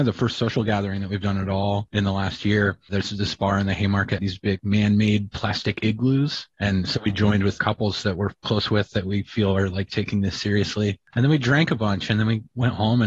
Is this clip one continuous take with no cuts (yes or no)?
no